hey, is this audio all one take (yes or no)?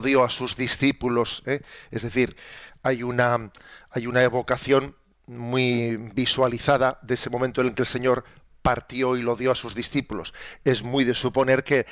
yes